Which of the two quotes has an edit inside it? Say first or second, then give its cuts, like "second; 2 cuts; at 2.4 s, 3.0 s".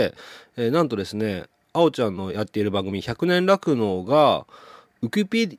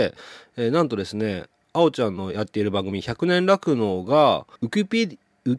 second; 1 cut; at 4.6 s